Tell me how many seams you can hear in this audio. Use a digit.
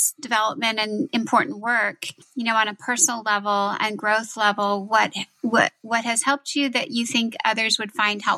0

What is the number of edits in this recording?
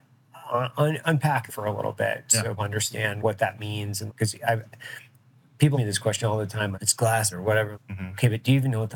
8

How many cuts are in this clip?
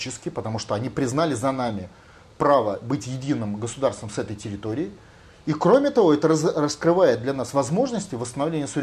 0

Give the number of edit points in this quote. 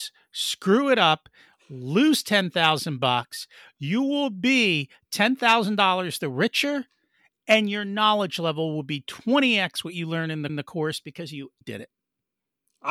2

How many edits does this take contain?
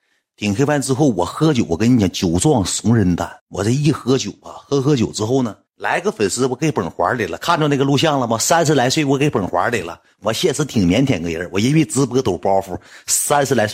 2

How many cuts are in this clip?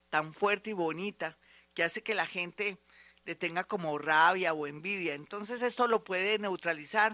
0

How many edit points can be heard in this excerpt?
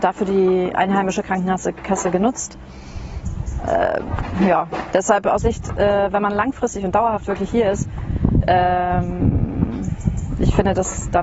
1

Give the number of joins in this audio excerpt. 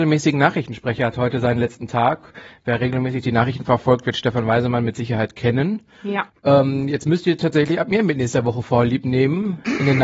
1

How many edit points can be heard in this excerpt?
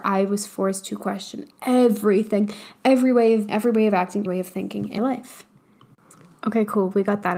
3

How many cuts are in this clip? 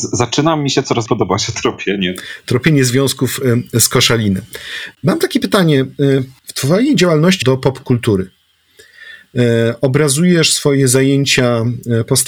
2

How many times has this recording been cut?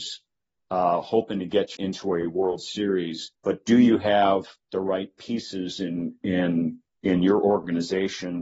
4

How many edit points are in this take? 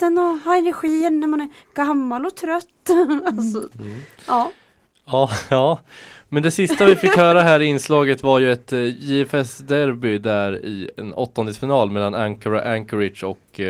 0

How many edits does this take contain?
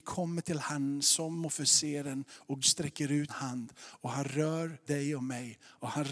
3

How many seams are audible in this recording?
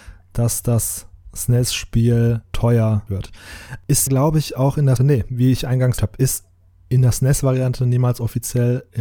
4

